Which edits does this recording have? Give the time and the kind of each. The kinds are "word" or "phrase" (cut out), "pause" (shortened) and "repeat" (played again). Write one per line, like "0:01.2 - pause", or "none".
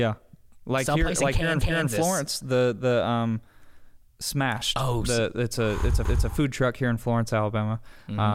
0:01.6 - repeat
0:06.0 - repeat